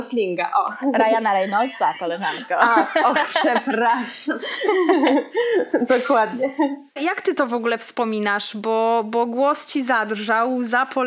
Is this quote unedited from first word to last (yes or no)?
yes